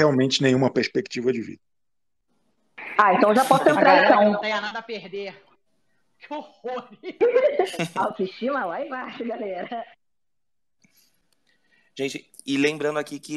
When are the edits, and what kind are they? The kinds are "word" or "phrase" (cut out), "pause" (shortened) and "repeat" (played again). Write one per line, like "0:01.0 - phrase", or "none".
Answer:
none